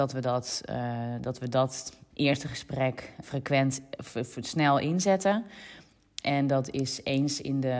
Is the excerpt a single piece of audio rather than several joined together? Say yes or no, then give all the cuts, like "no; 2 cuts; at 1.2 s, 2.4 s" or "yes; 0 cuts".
no; 2 cuts; at 2.1 s, 3.2 s